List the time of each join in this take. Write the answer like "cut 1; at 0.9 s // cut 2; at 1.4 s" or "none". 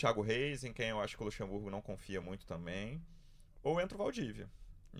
none